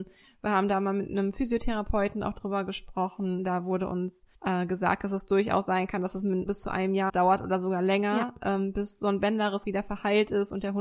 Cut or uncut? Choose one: cut